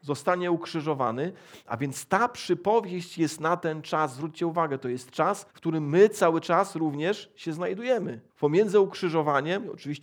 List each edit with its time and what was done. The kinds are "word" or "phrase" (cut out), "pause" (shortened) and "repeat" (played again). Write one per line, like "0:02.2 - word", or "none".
0:05.5 - pause
0:08.3 - pause